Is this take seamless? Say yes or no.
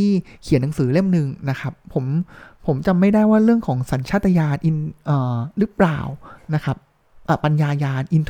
yes